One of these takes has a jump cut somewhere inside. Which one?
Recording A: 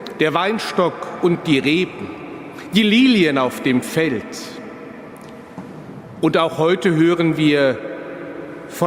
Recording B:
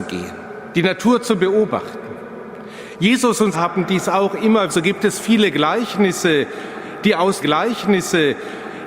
B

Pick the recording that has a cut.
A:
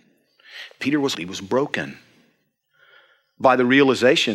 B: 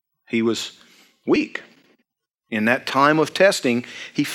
A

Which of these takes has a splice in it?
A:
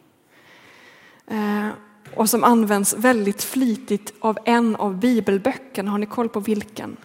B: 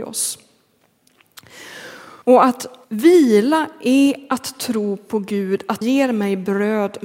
B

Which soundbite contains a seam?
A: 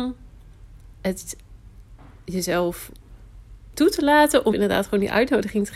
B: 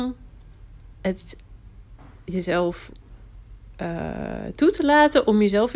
A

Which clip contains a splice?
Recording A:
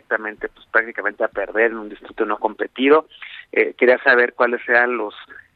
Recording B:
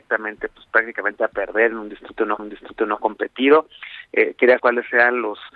B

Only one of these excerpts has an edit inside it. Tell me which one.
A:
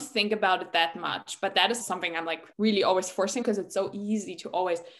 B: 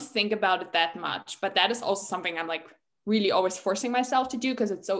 A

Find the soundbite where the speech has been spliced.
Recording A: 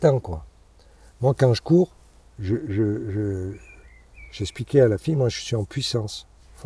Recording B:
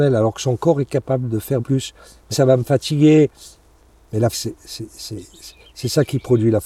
B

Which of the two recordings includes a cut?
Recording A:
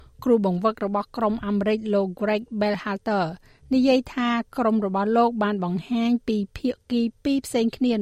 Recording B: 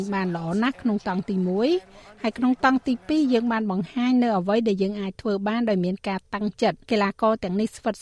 B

